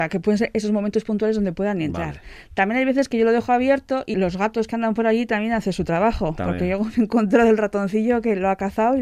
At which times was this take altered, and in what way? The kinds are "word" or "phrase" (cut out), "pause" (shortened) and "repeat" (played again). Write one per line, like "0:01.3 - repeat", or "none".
0:04.1 - word